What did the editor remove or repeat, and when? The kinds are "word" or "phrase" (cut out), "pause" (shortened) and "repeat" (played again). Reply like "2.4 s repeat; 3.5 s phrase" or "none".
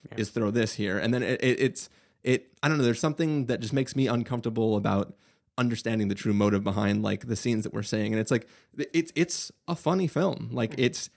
none